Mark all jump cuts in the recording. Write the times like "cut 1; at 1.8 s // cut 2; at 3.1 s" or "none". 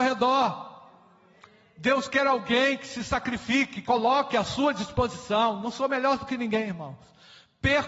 cut 1; at 3.9 s